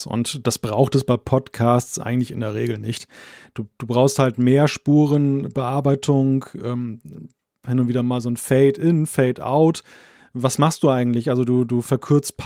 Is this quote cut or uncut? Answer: uncut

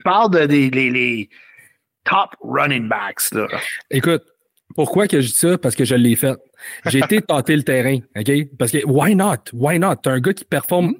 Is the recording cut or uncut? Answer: uncut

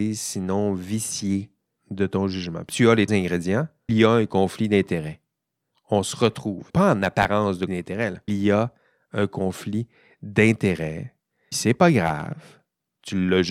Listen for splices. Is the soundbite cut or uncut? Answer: cut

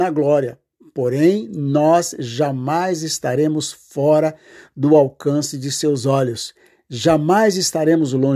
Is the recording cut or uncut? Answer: uncut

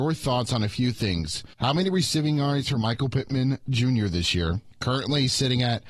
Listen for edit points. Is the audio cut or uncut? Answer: cut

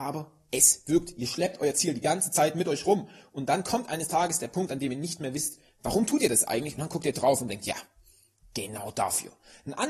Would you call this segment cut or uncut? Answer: uncut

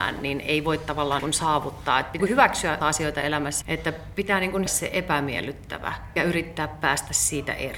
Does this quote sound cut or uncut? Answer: cut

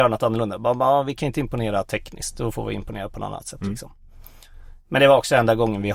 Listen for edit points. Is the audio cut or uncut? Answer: uncut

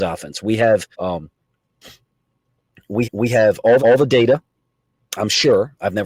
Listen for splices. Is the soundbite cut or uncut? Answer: cut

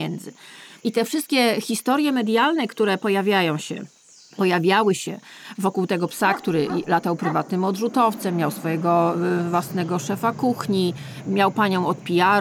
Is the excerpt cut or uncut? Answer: uncut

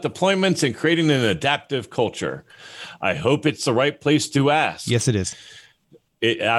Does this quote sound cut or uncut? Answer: uncut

